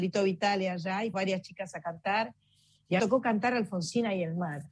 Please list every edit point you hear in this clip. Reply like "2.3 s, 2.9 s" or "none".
1.1 s, 3.0 s